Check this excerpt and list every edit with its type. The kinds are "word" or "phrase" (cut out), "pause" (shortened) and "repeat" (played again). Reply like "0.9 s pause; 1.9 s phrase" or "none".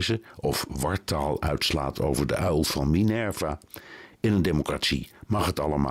none